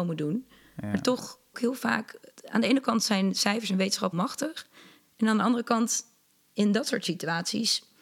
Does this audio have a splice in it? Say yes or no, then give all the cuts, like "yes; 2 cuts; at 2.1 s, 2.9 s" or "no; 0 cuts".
yes; 2 cuts; at 1.5 s, 4.1 s